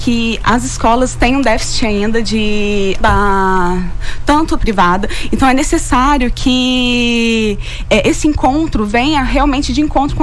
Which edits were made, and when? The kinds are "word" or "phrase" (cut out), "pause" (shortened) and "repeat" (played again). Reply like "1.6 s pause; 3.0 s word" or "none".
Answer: 3.0 s word; 4.6 s phrase